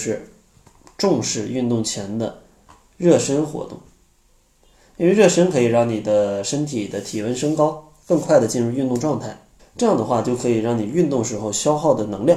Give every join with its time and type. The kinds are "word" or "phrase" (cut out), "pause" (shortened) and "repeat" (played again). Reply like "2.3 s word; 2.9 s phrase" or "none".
9.6 s pause